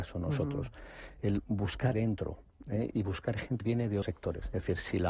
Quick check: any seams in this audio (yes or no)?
yes